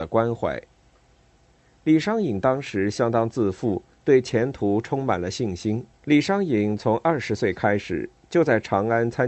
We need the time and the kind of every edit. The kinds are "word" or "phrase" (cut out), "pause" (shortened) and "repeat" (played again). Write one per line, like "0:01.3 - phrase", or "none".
0:05.9 - pause